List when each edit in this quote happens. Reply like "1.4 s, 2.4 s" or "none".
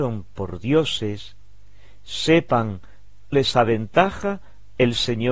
3.3 s